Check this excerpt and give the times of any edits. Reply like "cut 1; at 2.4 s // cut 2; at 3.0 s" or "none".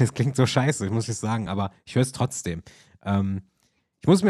none